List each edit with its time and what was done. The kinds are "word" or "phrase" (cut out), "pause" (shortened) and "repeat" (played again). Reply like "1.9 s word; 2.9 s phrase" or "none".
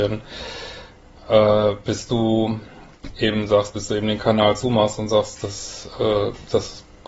none